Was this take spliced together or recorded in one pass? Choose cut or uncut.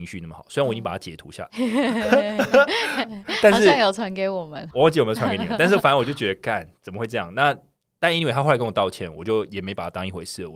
cut